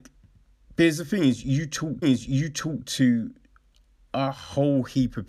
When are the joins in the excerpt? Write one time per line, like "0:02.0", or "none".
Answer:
0:02.0